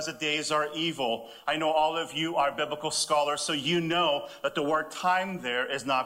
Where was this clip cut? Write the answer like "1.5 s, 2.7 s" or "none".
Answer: none